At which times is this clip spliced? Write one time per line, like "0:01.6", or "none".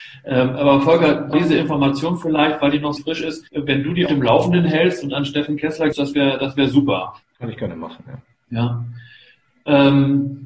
0:01.3
0:03.0
0:03.5
0:04.1
0:05.9
0:07.2